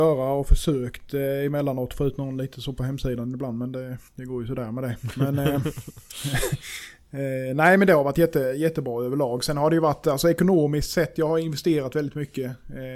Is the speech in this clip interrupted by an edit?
yes; 1 cut; at 4.1 s

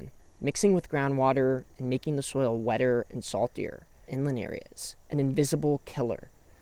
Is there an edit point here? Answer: yes; 2 cuts; at 4.1 s, 5.0 s

